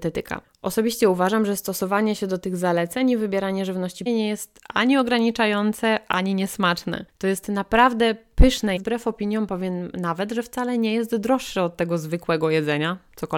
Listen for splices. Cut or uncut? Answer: cut